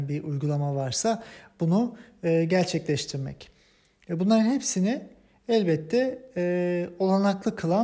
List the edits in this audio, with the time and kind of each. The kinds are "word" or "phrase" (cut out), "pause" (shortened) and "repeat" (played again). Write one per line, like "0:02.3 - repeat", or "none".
none